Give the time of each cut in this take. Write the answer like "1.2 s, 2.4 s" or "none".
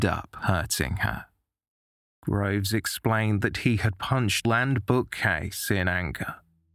4.4 s